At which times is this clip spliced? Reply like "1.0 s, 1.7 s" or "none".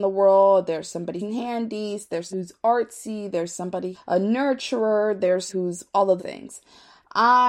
1.2 s, 2.3 s, 3.9 s, 5.5 s, 6.2 s